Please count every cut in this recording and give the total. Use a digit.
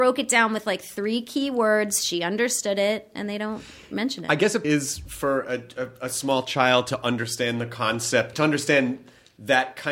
2